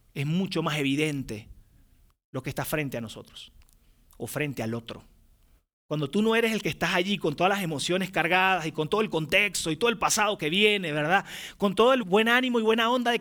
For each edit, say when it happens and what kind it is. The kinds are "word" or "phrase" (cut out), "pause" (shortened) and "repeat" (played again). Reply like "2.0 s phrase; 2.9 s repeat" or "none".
12.0 s word